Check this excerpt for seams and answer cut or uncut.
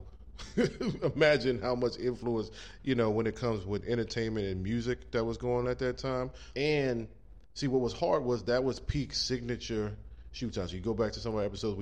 cut